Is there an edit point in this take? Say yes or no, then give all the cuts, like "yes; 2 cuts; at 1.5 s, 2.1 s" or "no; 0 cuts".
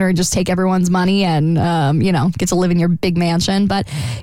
no; 0 cuts